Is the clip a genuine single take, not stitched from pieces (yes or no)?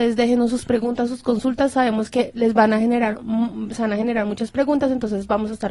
yes